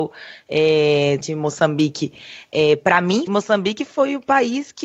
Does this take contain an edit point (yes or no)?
yes